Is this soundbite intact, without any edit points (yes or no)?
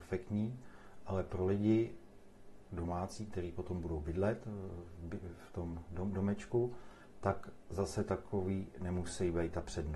yes